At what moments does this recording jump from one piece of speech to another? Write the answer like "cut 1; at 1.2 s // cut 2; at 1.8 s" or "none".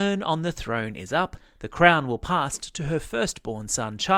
none